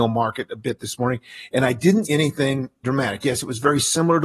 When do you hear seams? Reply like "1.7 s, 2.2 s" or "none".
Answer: 2.0 s, 2.8 s